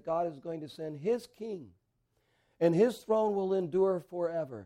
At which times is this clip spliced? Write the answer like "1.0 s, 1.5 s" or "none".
none